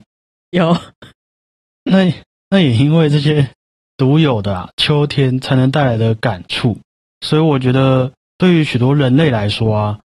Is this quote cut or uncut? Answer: uncut